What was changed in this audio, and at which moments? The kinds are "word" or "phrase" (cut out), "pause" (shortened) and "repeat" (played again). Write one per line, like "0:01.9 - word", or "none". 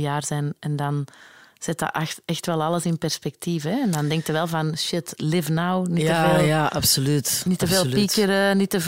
none

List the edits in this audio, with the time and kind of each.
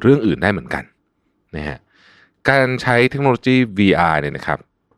none

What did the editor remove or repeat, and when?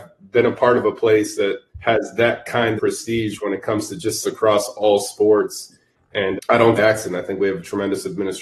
0:01.7 - pause
0:02.8 - word
0:04.2 - word
0:06.4 - word
0:06.8 - phrase

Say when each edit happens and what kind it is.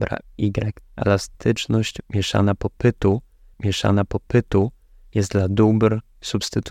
0:03.5 - repeat

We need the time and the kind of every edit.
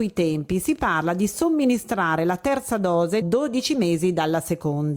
0:03.2 - word

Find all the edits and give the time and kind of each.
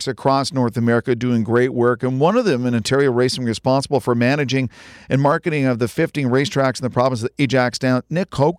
none

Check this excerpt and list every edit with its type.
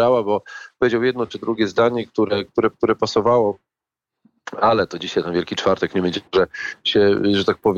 0:02.7 - repeat
0:06.3 - pause

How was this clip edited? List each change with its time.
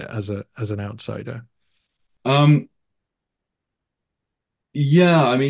none

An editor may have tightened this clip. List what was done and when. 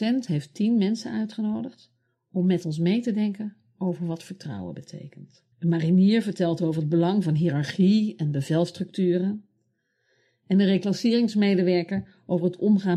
0:05.5 - pause

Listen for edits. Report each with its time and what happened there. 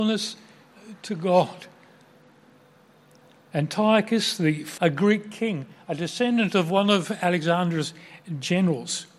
0:04.8 - word

